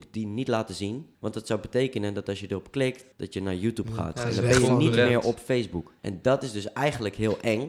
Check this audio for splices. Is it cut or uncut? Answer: cut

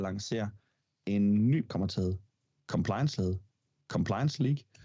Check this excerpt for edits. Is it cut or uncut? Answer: cut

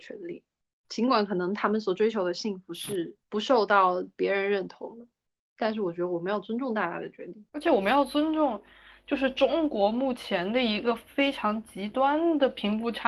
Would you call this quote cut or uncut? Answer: cut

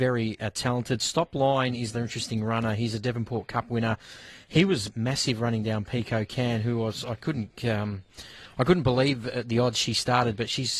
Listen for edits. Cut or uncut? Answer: cut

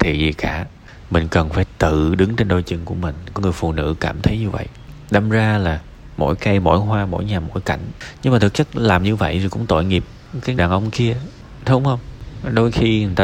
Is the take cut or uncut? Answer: cut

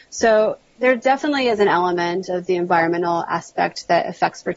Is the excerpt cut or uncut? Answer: uncut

